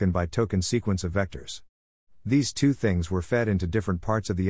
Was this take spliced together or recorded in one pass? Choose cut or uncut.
uncut